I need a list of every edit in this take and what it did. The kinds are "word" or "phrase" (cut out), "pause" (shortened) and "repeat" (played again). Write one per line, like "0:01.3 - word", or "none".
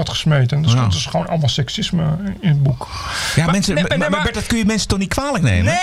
none